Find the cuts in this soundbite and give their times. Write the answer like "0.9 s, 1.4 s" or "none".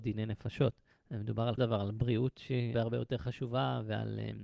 0.9 s, 1.6 s, 2.7 s